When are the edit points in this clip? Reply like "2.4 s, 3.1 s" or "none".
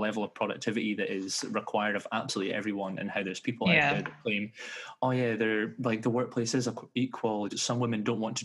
7.5 s